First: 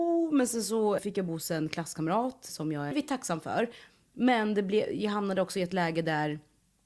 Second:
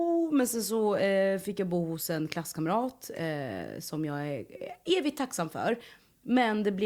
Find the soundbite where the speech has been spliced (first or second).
first